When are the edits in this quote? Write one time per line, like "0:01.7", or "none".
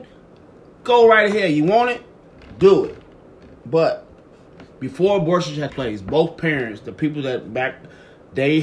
0:05.7